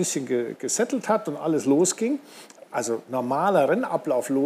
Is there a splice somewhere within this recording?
no; 0 cuts

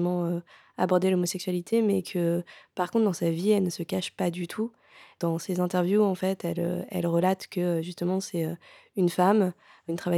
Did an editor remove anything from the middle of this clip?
no; 0 cuts

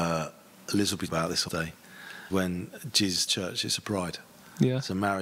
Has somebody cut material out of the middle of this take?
yes; 4 cuts; at 1.1 s, 1.5 s, 2.3 s, 3.3 s

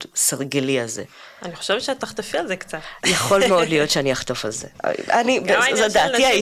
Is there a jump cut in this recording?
no; 0 cuts

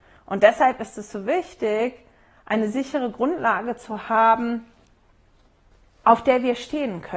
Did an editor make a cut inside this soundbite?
no; 0 cuts

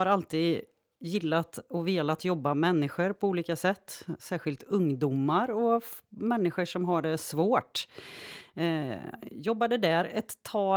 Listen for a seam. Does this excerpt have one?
yes; 1 cut; at 2.5 s

